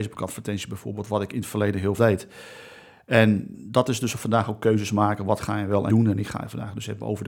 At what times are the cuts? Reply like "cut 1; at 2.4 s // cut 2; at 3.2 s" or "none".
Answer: cut 1; at 2.0 s // cut 2; at 3.5 s // cut 3; at 5.9 s